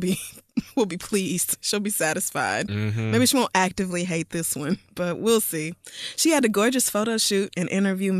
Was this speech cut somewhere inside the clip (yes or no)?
no